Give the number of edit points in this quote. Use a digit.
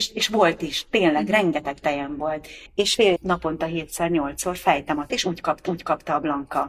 4